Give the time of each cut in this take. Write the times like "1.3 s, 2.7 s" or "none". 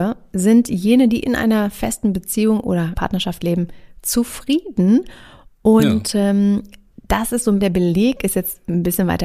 3.0 s, 7.6 s